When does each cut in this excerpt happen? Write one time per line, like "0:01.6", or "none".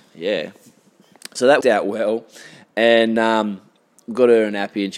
0:01.6